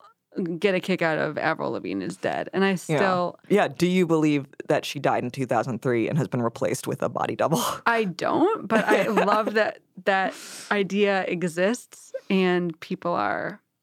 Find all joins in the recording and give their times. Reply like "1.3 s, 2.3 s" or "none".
3.4 s